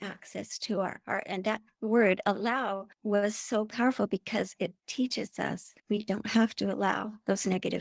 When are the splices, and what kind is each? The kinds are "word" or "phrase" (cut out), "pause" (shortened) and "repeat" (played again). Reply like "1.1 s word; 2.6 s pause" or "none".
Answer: 2.9 s pause; 5.8 s pause

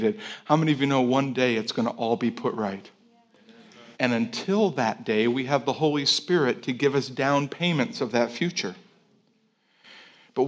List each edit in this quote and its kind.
3.9 s pause

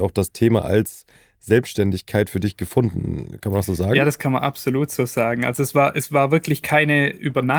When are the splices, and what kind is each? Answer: none

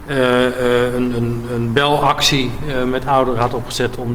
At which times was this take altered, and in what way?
none

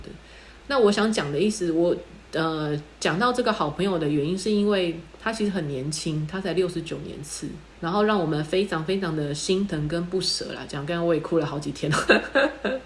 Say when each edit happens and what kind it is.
2.3 s pause; 7.7 s pause

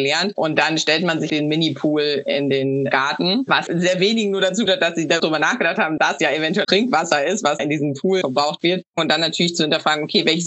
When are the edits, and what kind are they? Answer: 1.3 s word; 3.7 s word; 4.7 s word; 5.2 s word; 6.0 s word; 6.6 s word; 7.6 s word; 8.2 s word

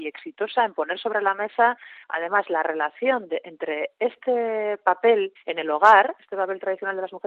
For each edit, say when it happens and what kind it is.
2.0 s pause; 5.3 s pause

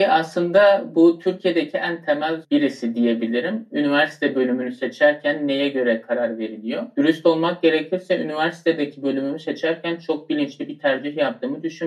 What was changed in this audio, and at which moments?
2.4 s word

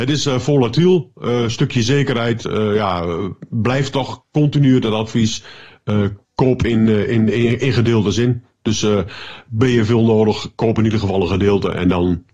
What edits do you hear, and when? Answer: 6.2 s pause

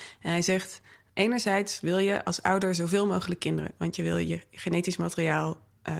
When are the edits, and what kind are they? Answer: none

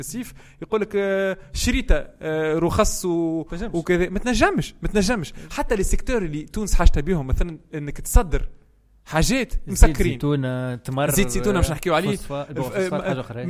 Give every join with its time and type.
none

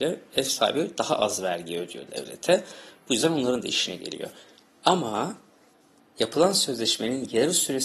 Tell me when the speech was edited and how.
none

